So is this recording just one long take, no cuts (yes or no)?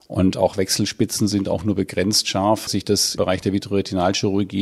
no